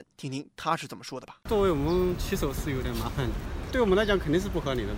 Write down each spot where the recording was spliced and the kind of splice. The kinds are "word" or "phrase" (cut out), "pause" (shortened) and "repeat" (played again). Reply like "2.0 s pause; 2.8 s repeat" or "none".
1.4 s pause